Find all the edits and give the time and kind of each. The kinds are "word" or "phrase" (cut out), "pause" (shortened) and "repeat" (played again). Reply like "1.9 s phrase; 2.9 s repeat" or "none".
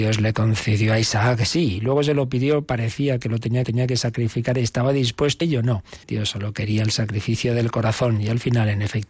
3.6 s repeat; 5.4 s word; 6.0 s pause